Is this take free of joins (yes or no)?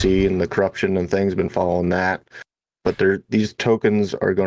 yes